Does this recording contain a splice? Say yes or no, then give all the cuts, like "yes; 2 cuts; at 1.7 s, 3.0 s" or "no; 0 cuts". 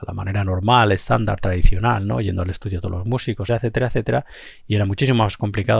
yes; 1 cut; at 3.5 s